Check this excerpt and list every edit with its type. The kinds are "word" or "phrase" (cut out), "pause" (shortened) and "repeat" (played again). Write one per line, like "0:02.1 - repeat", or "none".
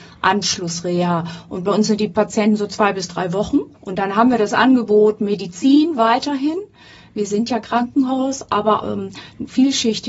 0:03.7 - pause
0:08.8 - word

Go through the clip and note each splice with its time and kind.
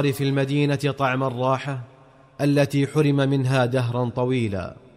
none

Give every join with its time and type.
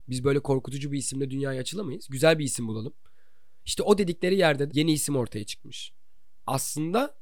0:04.7 - word

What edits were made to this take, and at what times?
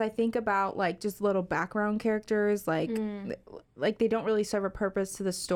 none

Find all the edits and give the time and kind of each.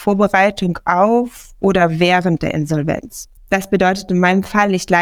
0:03.4 - pause

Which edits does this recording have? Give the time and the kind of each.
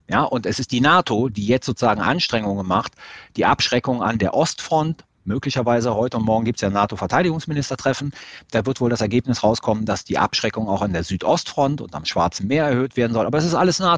none

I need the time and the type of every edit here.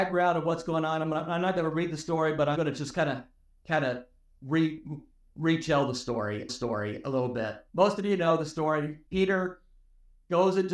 0:02.5 - word
0:06.5 - repeat
0:07.7 - pause
0:09.1 - pause

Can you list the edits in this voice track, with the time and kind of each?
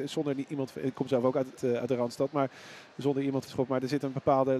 0:01.6 - word
0:03.5 - phrase

